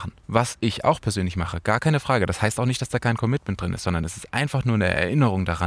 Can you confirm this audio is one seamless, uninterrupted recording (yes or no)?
yes